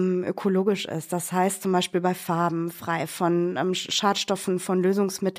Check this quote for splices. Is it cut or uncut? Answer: uncut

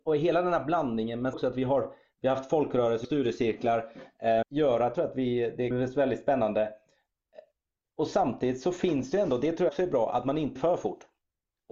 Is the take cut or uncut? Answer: cut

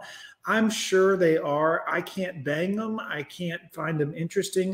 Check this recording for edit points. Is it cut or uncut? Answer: uncut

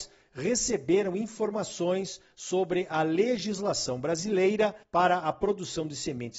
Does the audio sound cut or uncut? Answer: cut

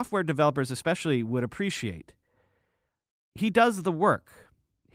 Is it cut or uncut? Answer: uncut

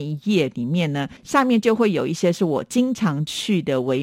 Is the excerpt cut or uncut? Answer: cut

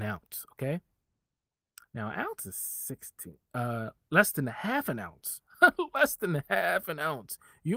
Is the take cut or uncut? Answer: cut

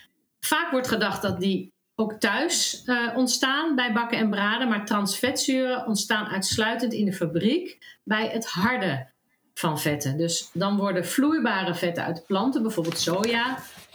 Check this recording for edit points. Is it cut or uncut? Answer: uncut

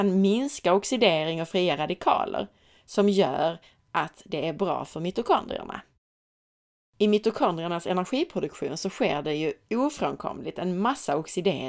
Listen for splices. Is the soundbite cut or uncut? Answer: uncut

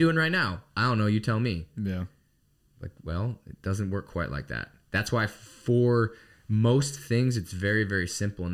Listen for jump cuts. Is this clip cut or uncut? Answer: uncut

